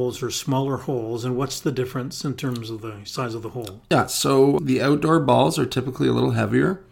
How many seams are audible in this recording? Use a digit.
1